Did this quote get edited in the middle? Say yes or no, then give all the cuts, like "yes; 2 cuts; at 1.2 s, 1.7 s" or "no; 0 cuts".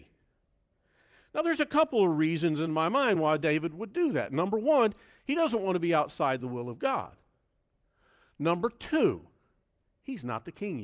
no; 0 cuts